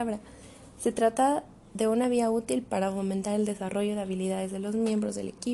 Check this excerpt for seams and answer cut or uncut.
uncut